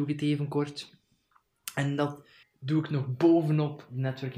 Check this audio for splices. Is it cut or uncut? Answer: cut